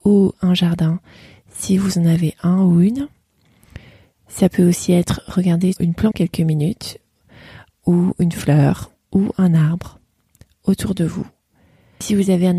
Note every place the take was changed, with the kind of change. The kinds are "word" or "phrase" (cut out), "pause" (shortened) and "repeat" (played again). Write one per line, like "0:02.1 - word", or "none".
0:05.8 - word
0:06.1 - word